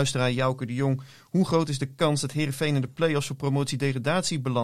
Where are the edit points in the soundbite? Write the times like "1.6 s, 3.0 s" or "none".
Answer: none